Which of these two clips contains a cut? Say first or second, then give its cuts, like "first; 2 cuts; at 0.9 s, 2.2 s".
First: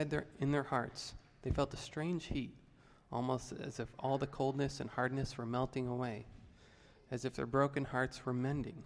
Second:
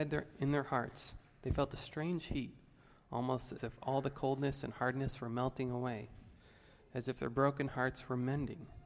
second; 1 cut; at 3.6 s